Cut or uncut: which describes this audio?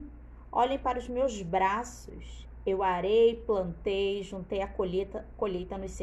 uncut